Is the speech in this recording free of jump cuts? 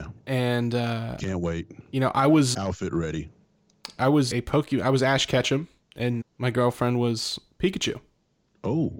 no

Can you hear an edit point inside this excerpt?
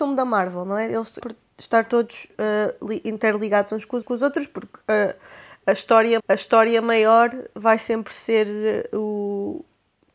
yes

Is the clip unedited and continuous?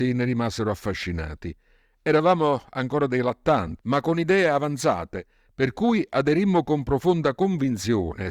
no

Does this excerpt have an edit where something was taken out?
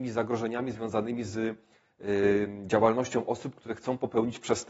no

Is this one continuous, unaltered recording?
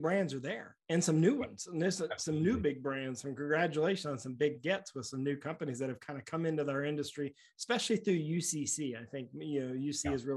yes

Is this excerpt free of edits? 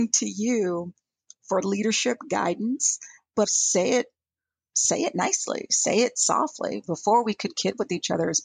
no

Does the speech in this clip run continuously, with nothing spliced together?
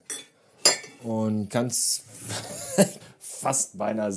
no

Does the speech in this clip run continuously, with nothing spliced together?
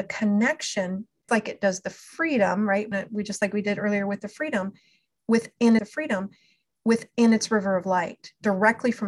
no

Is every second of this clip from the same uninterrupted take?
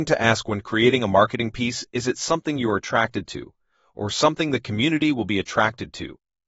yes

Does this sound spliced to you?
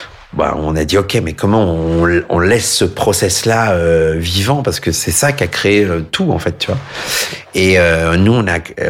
no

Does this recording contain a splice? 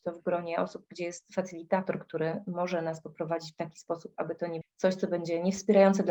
yes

